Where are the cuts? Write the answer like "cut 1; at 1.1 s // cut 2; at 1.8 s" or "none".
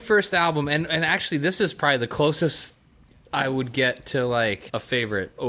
none